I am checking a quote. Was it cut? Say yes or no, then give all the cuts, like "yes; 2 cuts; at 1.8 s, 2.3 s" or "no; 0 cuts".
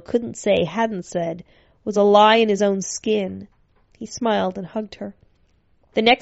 no; 0 cuts